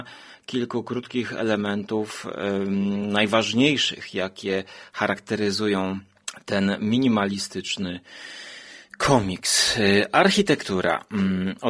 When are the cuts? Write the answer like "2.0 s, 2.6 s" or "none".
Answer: none